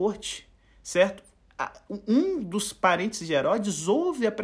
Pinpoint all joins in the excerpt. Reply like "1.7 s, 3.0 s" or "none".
none